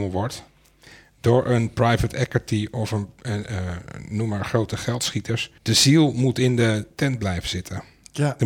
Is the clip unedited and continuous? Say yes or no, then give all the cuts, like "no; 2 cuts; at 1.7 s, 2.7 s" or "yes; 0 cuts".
no; 1 cut; at 5.6 s